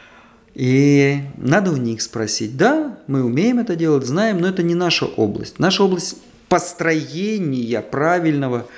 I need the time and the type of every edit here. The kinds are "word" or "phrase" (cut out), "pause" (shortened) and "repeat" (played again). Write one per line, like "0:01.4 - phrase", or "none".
none

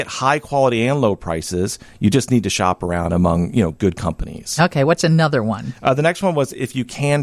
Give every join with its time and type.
none

